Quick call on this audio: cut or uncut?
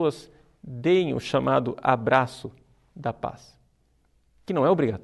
uncut